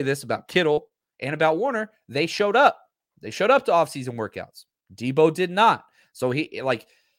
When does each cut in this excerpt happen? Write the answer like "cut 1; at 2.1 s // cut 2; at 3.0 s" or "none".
none